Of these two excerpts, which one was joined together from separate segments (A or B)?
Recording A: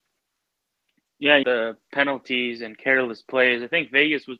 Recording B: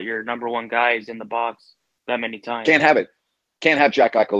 A